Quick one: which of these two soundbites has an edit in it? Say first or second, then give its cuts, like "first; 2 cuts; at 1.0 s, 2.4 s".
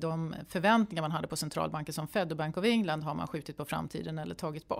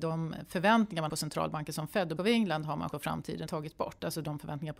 second; 4 cuts; at 1.1 s, 2.2 s, 2.9 s, 3.5 s